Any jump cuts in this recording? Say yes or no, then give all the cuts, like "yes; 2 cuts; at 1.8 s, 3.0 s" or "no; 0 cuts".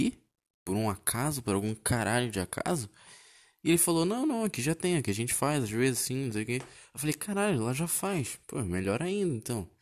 no; 0 cuts